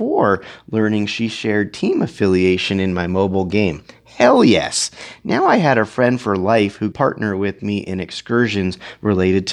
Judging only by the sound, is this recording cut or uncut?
cut